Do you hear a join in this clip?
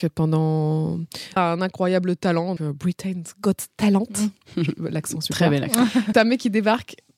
yes; 3 cuts; at 1.4 s, 2.6 s, 6.1 s

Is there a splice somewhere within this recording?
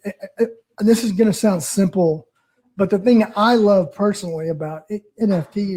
no; 0 cuts

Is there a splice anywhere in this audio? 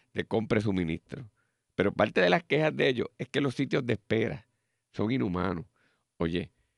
no; 0 cuts

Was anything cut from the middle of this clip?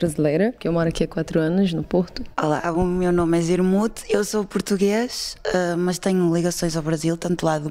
no; 0 cuts

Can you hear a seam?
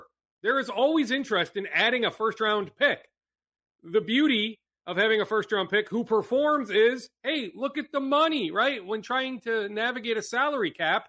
no; 0 cuts

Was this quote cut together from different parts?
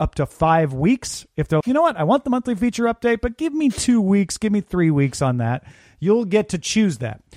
yes; 1 cut; at 1.6 s

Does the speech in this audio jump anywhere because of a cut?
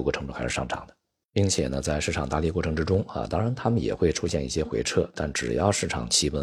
no; 0 cuts

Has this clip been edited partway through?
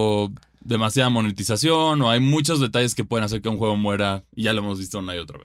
no; 0 cuts

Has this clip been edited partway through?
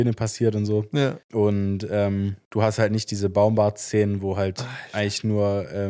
yes; 2 cuts; at 1.2 s, 2.5 s

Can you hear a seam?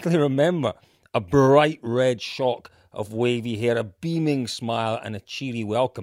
no; 0 cuts

